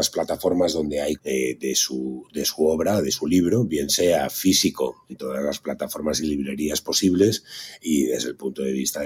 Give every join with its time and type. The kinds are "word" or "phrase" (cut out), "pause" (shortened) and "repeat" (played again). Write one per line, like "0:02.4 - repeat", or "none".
0:01.2 - word
0:05.1 - word